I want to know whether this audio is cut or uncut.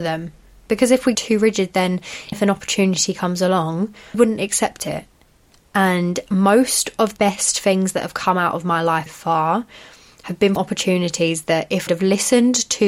cut